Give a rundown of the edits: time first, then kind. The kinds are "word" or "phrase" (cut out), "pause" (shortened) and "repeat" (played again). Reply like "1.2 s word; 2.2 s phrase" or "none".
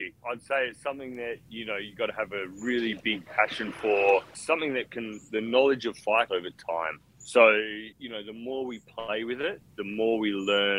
6.3 s phrase; 7.9 s pause